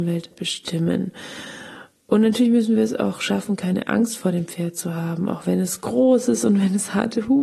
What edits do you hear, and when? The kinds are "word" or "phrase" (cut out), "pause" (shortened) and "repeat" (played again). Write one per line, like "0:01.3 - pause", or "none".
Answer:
0:01.9 - pause